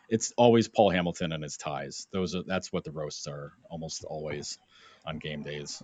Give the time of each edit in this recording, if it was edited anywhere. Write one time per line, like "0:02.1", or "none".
none